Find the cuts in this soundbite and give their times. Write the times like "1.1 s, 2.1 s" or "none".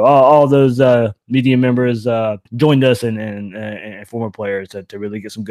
2.5 s